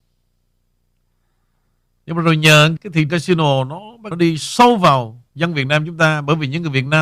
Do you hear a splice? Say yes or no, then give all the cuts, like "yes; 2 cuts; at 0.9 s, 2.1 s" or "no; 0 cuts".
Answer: yes; 4 cuts; at 2.8 s, 3.1 s, 4.1 s, 5.3 s